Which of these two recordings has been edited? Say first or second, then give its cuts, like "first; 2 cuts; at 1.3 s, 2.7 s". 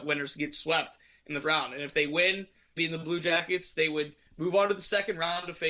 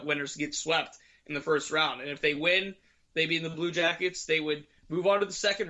first; 2 cuts; at 1.4 s, 2.8 s